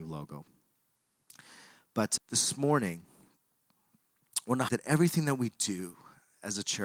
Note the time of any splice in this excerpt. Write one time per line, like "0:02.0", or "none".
0:02.2
0:04.7